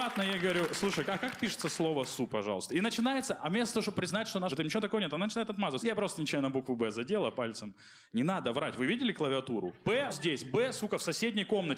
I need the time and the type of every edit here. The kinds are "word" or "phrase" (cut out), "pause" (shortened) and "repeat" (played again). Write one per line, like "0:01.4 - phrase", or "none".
0:02.3 - word
0:03.9 - word
0:04.5 - word
0:05.8 - word
0:10.1 - word